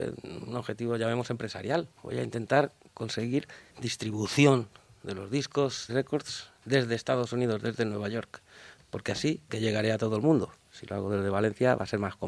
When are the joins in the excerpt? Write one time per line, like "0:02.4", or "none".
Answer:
0:02.0
0:03.7
0:05.9
0:09.5

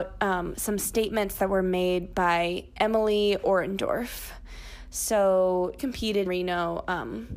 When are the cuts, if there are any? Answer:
0:05.8
0:06.3

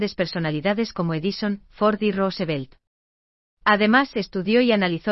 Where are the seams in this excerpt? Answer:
none

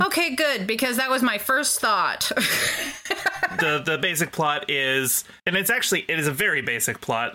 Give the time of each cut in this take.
0:05.4

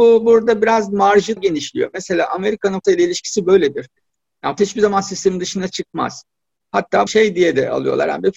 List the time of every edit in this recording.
0:01.4
0:02.8
0:04.6
0:07.1

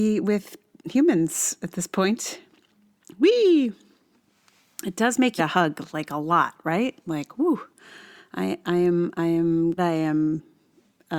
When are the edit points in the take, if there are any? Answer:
0:05.4
0:09.8

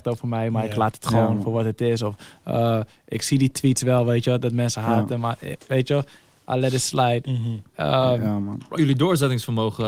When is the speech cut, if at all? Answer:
0:08.7

